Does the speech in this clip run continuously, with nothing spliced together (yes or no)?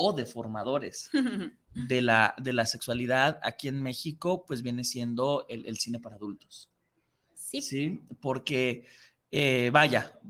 yes